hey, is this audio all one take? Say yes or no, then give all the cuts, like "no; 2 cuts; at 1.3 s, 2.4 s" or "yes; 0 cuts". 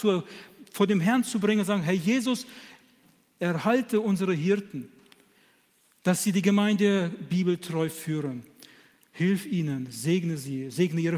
yes; 0 cuts